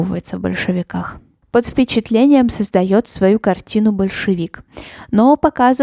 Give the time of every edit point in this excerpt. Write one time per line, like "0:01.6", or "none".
0:01.4